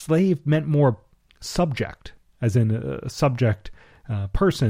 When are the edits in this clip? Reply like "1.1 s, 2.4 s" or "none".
none